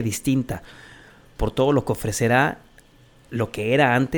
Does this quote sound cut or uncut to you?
uncut